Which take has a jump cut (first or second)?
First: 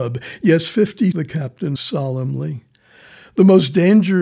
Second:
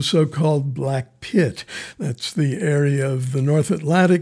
first